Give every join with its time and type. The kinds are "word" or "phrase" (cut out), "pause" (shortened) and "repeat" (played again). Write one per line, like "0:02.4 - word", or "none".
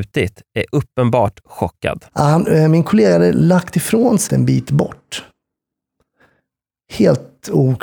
0:02.1 - pause
0:04.3 - word

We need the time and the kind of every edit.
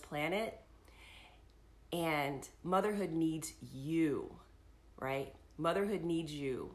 none

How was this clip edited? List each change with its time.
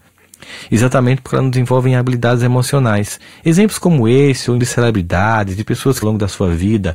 0:04.6 - word
0:06.0 - word

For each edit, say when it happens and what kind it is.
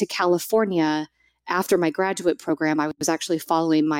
none

